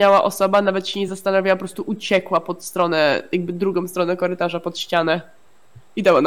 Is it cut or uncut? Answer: uncut